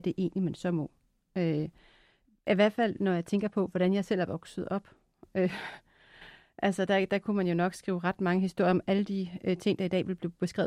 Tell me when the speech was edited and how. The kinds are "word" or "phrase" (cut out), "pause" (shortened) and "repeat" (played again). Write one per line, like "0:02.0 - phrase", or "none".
none